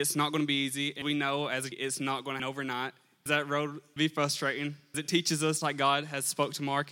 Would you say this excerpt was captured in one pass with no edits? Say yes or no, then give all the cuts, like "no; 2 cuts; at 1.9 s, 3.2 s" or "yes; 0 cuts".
no; 7 cuts; at 1.0 s, 1.7 s, 2.4 s, 3.3 s, 4.0 s, 4.9 s, 5.6 s